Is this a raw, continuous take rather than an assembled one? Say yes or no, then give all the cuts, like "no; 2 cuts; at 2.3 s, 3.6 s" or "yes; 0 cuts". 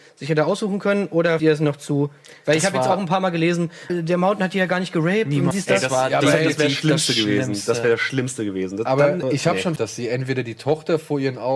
no; 5 cuts; at 1.4 s, 3.9 s, 5.5 s, 9.2 s, 9.8 s